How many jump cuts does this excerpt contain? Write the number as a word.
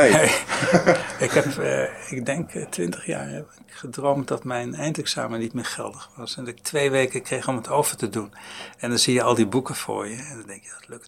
zero